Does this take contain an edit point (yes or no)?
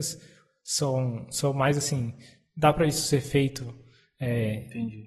no